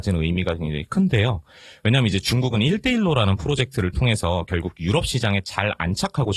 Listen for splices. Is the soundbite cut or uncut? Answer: uncut